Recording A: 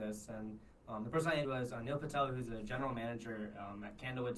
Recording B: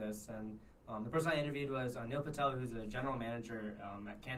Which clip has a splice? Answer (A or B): A